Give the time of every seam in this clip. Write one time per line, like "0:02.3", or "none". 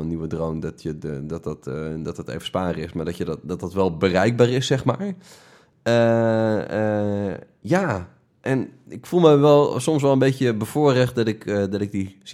none